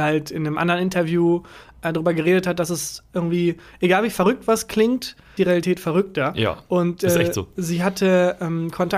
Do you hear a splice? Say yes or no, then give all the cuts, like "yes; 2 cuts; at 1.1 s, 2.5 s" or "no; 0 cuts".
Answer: yes; 1 cut; at 5.4 s